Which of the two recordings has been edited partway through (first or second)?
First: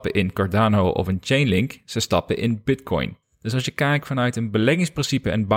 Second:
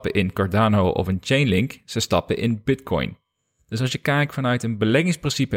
first